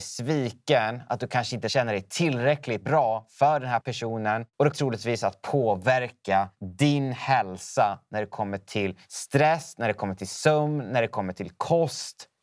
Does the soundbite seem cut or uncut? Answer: cut